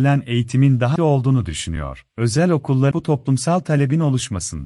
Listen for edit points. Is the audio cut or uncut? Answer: cut